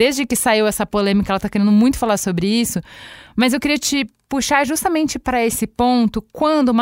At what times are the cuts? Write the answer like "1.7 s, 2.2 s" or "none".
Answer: none